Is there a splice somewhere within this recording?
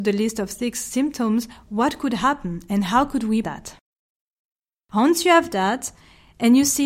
yes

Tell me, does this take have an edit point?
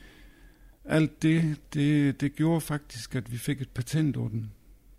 no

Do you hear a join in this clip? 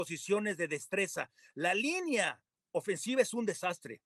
no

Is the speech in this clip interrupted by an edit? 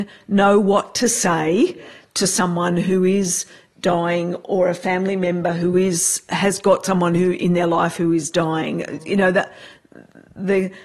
no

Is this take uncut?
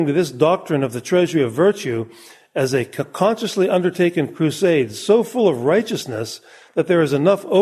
yes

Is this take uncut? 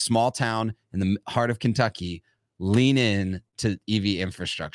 yes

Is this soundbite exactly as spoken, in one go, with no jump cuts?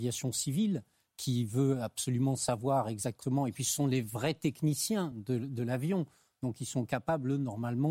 yes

